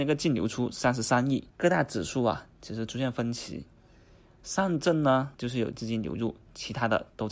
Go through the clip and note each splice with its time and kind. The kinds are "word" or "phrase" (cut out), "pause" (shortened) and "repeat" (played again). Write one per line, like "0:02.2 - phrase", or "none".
0:01.5 - pause
0:05.3 - word